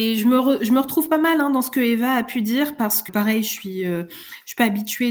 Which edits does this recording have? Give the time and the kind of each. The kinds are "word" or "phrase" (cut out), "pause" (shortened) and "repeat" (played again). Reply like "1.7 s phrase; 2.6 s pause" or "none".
3.1 s word